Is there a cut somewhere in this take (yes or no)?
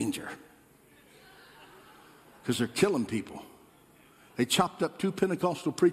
no